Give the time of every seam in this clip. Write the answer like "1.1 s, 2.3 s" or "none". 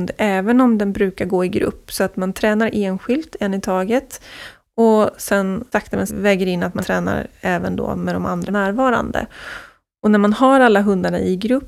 5.7 s, 6.1 s, 6.8 s, 8.5 s